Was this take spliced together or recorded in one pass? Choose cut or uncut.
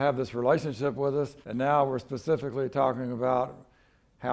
cut